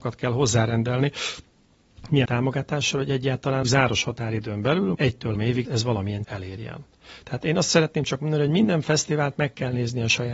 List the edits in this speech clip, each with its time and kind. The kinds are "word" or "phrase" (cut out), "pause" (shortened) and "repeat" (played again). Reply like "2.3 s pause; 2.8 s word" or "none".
2.2 s word; 3.6 s word; 4.9 s word; 5.3 s word; 5.6 s word; 6.2 s word

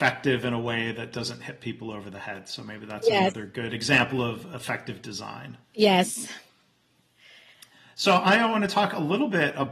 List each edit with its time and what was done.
5.6 s pause

